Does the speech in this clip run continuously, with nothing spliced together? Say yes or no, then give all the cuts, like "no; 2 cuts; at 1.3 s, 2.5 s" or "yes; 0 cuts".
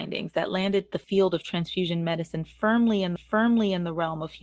no; 1 cut; at 3.2 s